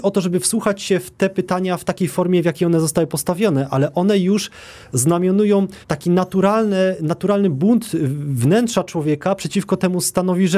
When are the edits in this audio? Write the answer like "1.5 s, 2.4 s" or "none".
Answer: 5.8 s

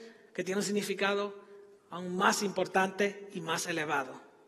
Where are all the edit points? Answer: none

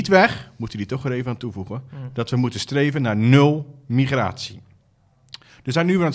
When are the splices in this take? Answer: none

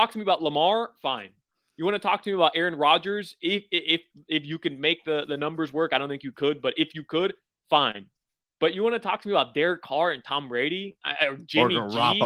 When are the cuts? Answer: none

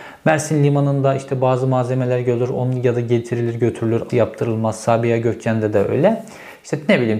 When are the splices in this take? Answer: 4.1 s

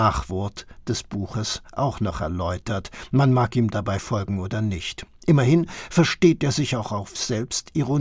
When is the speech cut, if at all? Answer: none

